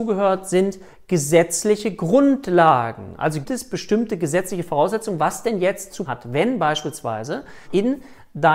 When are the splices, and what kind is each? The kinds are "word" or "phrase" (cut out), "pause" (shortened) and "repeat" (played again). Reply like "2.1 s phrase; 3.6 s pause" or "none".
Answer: 3.4 s word; 6.0 s word; 7.6 s word